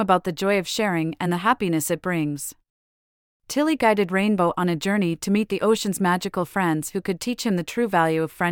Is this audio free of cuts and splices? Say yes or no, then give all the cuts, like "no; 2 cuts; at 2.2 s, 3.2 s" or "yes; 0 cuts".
yes; 0 cuts